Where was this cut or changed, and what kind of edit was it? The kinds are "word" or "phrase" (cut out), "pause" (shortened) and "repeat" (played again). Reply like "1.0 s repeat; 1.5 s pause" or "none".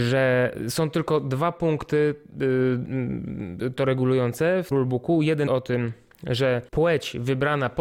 4.7 s word; 5.5 s word; 6.7 s pause

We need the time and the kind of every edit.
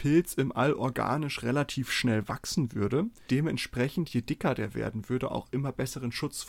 3.3 s word

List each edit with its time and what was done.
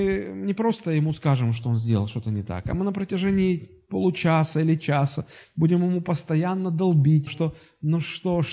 7.3 s word

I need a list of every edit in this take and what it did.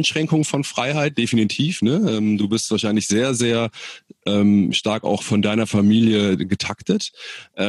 none

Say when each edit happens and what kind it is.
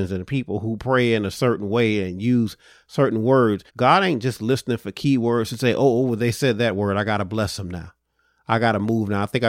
3.7 s pause

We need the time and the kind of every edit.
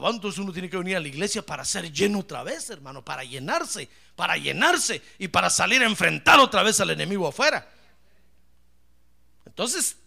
none

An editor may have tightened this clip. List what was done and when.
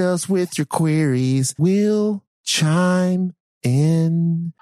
1.6 s word; 2.3 s pause

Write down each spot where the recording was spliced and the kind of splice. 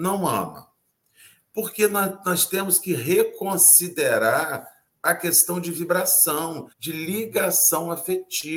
6.7 s pause

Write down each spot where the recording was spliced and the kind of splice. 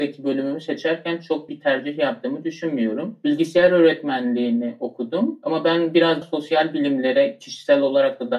1.5 s word; 6.2 s word

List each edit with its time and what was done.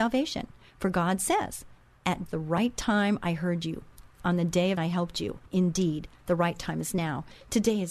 2.3 s word; 4.8 s word; 5.5 s pause

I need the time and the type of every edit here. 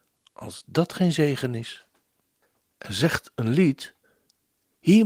none

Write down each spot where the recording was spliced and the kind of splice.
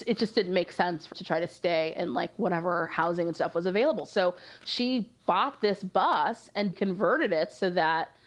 1.1 s word; 6.7 s word

